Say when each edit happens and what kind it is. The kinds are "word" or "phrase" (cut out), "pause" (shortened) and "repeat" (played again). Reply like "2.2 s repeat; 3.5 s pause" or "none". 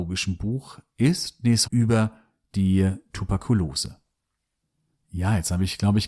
1.6 s phrase